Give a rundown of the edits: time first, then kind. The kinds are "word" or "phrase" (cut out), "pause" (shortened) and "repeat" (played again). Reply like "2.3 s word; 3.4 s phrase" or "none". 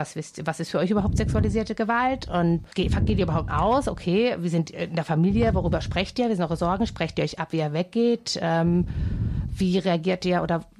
3.5 s word